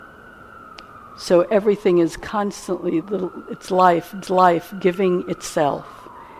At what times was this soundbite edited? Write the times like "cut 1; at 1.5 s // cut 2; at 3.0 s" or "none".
cut 1; at 3.0 s // cut 2; at 4.2 s

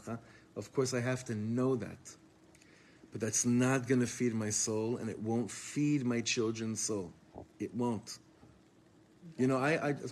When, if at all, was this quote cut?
cut 1; at 7.5 s

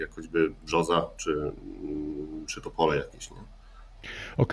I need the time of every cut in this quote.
cut 1; at 2.5 s

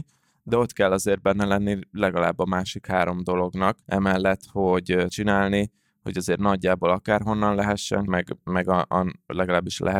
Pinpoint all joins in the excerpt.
cut 1; at 3.8 s // cut 2; at 5.1 s // cut 3; at 8.1 s

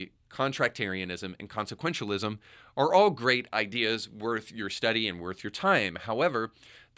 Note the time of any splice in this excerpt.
none

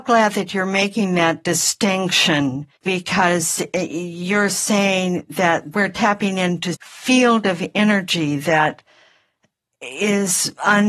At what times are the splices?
cut 1; at 2.8 s // cut 2; at 5.7 s // cut 3; at 6.7 s

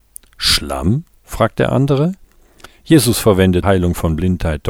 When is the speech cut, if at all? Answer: cut 1; at 3.6 s

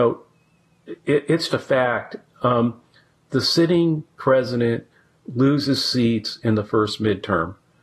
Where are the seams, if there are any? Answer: cut 1; at 1.5 s

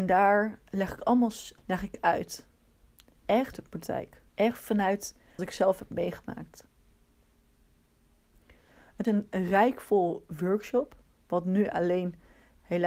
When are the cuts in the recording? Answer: cut 1; at 1.6 s // cut 2; at 3.5 s // cut 3; at 4.3 s // cut 4; at 5.4 s // cut 5; at 9.0 s

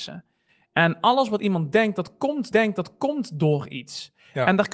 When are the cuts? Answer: cut 1; at 2.5 s

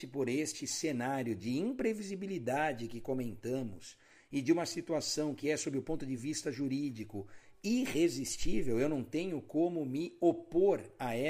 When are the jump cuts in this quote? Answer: none

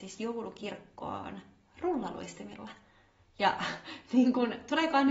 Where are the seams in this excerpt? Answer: none

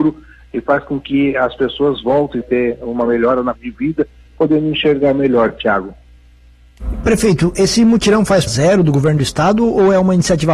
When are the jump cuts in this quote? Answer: cut 1; at 2.4 s // cut 2; at 3.5 s // cut 3; at 8.5 s

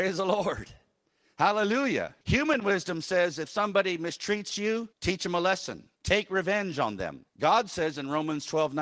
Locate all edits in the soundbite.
cut 1; at 2.2 s // cut 2; at 4.9 s // cut 3; at 5.9 s // cut 4; at 7.3 s

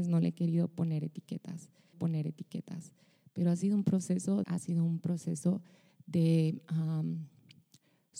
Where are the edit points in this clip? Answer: cut 1; at 1.9 s // cut 2; at 4.4 s

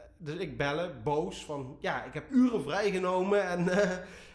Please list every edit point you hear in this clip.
cut 1; at 2.3 s

